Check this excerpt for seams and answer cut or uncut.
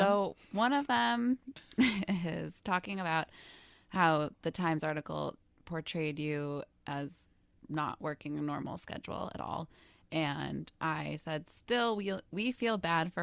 uncut